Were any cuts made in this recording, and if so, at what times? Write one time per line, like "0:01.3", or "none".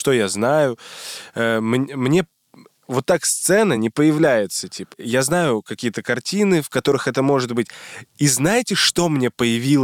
none